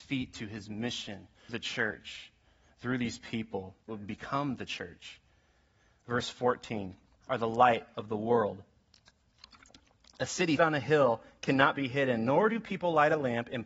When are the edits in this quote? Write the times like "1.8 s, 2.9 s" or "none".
1.5 s, 3.9 s, 7.2 s, 10.6 s